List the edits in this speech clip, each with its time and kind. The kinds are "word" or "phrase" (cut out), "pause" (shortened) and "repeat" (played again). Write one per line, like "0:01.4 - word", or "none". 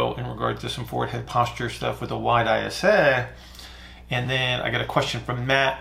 none